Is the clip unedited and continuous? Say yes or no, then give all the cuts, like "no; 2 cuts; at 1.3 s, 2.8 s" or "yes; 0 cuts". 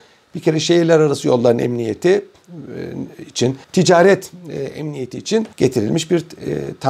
no; 2 cuts; at 3.6 s, 5.5 s